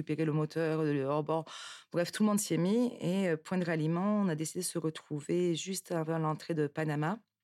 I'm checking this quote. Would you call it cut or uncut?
uncut